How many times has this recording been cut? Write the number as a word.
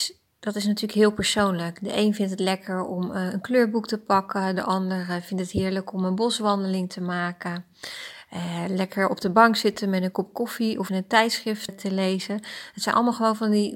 two